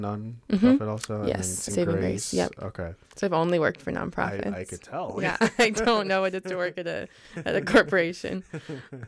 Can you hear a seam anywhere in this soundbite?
yes; 3 cuts; at 1.7 s, 3.0 s, 6.4 s

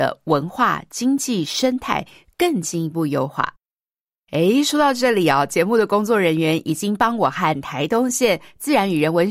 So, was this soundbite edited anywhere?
no; 0 cuts

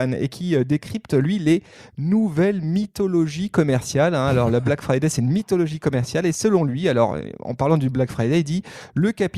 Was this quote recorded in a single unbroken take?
yes; 0 cuts

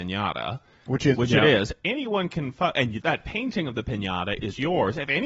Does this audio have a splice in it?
yes; 2 cuts; at 1.1 s, 3.0 s

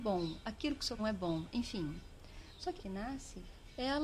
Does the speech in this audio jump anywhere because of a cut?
yes; 2 cuts; at 1.0 s, 2.8 s

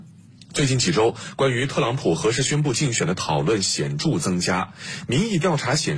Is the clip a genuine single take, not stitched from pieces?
yes; 0 cuts

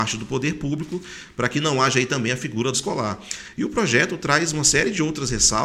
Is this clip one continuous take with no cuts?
no; 1 cut; at 2.7 s

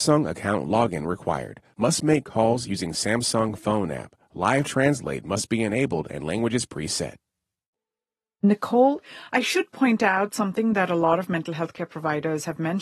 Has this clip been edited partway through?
no; 0 cuts

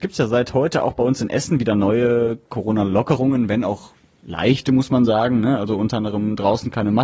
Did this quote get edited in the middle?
no; 0 cuts

